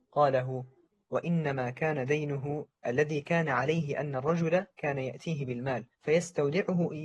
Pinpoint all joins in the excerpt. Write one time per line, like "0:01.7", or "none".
0:05.9